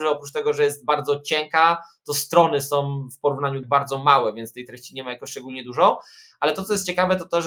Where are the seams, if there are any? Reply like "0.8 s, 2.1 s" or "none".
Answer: 3.6 s